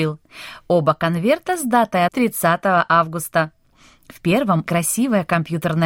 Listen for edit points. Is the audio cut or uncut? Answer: cut